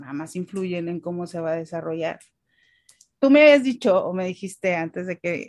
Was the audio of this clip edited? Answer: no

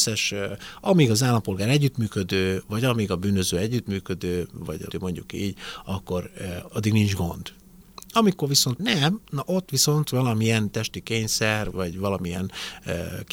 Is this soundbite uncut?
no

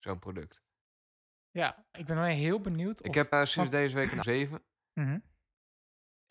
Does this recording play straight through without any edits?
no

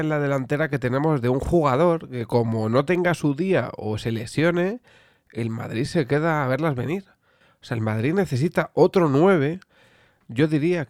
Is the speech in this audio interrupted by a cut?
no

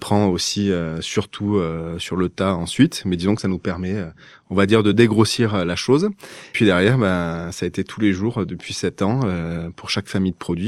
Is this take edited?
no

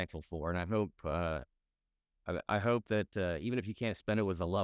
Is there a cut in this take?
no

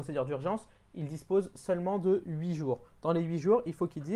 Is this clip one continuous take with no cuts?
yes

